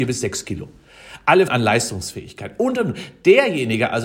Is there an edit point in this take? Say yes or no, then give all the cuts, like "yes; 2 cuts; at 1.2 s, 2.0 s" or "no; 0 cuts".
yes; 1 cut; at 1.5 s